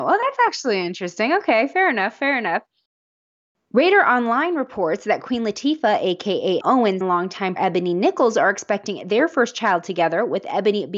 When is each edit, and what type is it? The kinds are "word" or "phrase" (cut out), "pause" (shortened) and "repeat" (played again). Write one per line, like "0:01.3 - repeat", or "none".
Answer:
0:06.6 - word
0:07.0 - word
0:07.6 - word